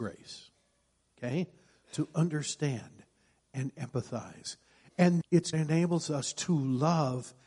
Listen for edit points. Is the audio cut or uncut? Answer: cut